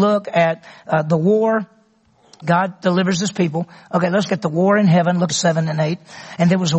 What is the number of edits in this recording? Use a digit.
3